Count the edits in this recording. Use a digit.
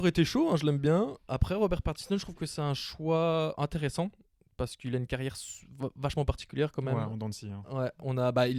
0